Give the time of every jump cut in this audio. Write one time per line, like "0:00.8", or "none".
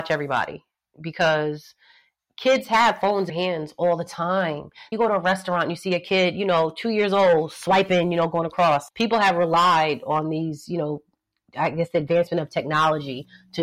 0:03.3
0:04.9
0:08.9